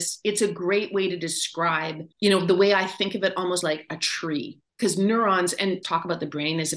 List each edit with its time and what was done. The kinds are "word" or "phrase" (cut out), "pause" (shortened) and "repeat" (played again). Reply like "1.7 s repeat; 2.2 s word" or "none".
2.1 s pause; 3.6 s word; 4.7 s pause; 5.8 s phrase